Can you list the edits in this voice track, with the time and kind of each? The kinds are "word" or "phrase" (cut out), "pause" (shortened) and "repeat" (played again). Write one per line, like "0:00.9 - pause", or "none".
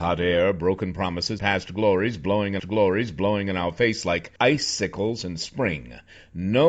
0:01.4 - word
0:02.6 - repeat
0:04.4 - pause

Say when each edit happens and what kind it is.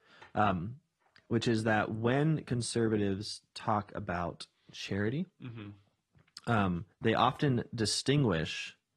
0:06.9 - pause

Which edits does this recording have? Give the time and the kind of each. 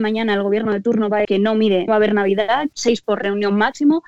0:01.2 - word
0:01.9 - word
0:02.7 - word
0:03.0 - word

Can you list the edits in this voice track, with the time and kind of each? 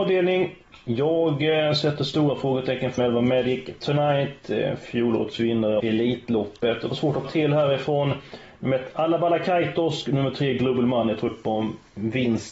0:03.0 - word
0:05.8 - word
0:06.9 - word
0:07.2 - word
0:10.1 - word
0:11.3 - word

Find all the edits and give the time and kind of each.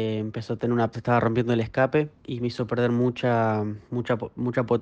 0:00.9 - phrase
0:02.2 - pause
0:03.8 - pause

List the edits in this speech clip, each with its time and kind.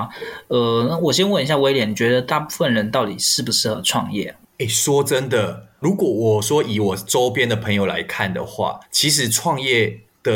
0:05.8 - word
0:08.8 - pause

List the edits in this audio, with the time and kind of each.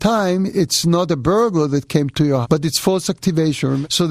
0:02.4 - word

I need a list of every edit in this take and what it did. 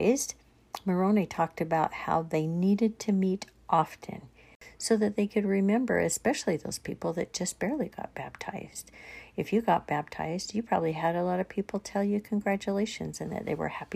none

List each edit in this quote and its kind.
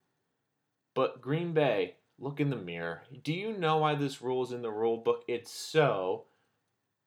none

